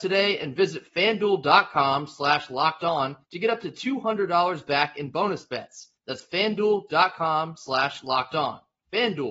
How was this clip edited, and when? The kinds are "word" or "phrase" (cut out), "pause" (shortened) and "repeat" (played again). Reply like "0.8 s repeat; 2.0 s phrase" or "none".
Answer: 3.2 s pause; 6.0 s pause